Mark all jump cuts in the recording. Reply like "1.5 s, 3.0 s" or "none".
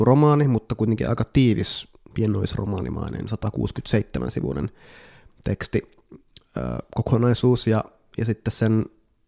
none